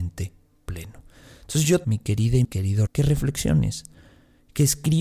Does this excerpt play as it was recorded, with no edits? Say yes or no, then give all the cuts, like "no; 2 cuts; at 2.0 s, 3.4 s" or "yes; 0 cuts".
no; 3 cuts; at 1.8 s, 2.4 s, 2.9 s